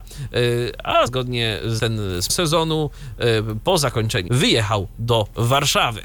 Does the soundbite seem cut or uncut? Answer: cut